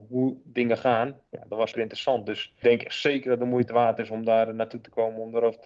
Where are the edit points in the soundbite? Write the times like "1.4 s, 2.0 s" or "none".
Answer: 1.7 s, 2.6 s